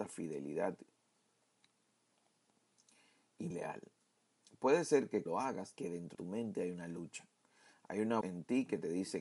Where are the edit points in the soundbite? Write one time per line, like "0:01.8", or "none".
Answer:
0:03.5
0:05.3
0:05.8
0:06.1
0:08.2